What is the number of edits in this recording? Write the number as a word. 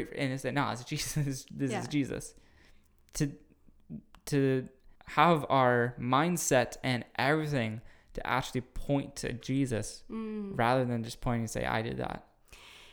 one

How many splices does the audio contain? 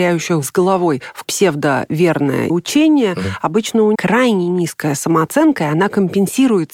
three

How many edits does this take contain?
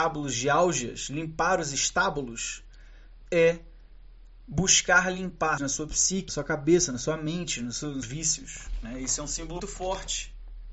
four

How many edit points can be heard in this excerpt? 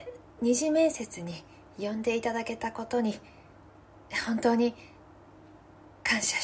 zero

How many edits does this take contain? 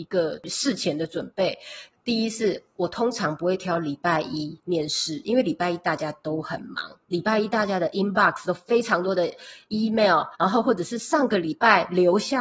one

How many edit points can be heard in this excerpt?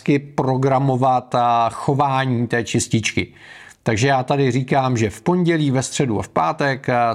zero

